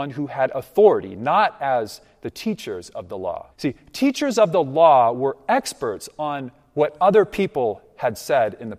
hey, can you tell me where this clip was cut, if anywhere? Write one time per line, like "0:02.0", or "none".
0:03.5